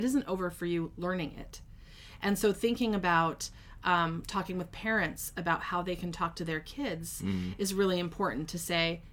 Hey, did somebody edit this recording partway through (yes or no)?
no